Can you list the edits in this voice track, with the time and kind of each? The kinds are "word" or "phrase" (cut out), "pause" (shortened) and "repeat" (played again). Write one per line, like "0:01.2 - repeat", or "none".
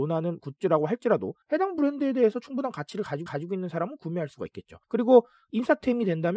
0:01.4 - pause
0:03.3 - repeat
0:04.8 - pause